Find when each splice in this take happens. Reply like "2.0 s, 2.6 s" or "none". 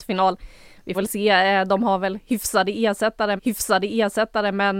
0.9 s, 3.4 s